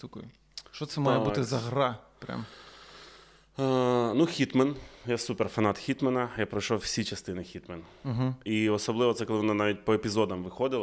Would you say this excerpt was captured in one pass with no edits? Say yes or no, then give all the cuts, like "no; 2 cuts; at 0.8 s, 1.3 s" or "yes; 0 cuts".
yes; 0 cuts